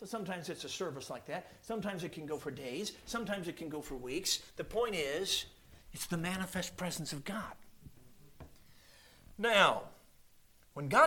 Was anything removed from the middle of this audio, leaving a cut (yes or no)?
yes